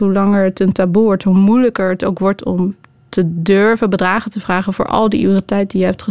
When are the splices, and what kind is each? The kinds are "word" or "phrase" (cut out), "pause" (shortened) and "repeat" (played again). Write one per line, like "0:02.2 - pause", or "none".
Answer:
none